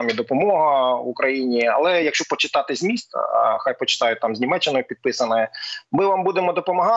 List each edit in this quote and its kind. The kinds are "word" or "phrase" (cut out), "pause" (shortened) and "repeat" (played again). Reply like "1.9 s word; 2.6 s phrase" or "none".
none